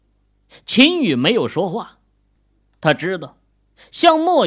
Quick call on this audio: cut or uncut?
uncut